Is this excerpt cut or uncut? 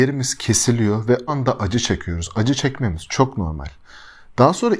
cut